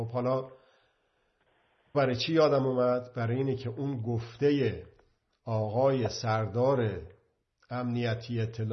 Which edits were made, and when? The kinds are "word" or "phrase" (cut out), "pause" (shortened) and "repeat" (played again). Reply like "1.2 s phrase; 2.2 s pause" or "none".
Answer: 1.9 s word